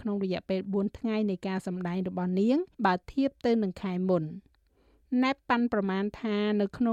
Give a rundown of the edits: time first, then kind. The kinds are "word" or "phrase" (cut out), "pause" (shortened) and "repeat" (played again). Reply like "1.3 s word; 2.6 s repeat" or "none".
2.7 s pause